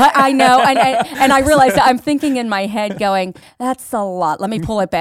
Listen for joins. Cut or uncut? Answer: uncut